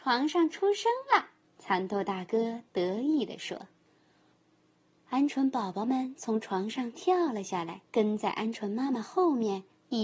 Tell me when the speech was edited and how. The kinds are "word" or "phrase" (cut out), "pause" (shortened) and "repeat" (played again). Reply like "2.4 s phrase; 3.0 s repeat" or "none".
1.4 s pause; 3.8 s pause; 7.9 s pause